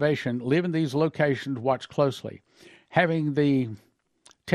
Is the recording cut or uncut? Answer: uncut